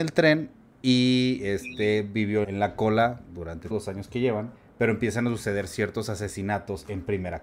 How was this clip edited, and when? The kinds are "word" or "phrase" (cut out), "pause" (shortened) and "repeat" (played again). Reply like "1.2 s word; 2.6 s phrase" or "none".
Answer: 2.4 s phrase; 3.7 s word; 4.6 s pause